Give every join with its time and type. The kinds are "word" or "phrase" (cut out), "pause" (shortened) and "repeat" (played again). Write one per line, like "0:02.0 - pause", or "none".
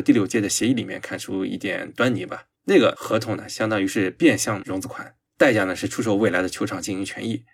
0:02.5 - pause
0:05.3 - pause